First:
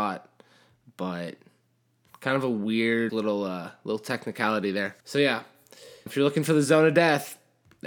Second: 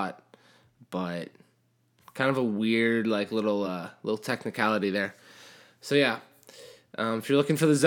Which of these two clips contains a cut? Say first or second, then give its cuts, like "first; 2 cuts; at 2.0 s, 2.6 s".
first; 3 cuts; at 3.1 s, 5.0 s, 6.1 s